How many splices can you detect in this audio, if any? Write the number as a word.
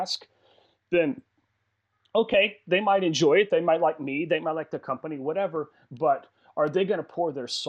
zero